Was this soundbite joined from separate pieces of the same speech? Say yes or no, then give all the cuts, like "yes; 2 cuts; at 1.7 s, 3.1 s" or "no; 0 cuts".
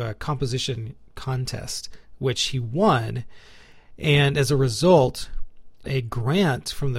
yes; 1 cut; at 5.8 s